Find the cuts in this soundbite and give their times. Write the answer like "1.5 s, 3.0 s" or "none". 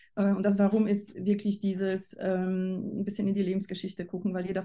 none

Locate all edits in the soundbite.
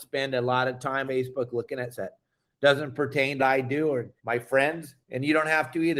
1.1 s, 1.9 s, 3.4 s, 4.2 s, 5.0 s

